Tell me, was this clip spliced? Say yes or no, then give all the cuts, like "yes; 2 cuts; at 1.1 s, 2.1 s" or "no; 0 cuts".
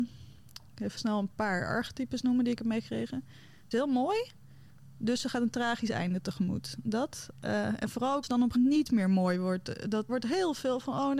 yes; 7 cuts; at 1.0 s, 1.3 s, 2.6 s, 3.7 s, 8.2 s, 8.5 s, 10.1 s